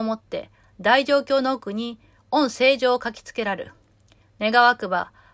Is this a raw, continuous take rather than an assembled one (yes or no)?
yes